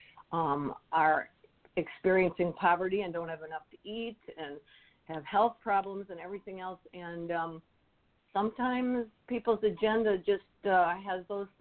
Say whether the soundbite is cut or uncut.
uncut